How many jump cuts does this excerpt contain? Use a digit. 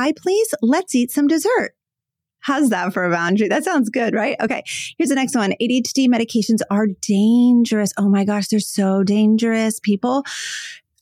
0